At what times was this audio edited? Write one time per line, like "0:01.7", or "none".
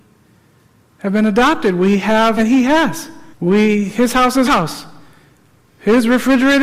0:02.4
0:03.3
0:04.5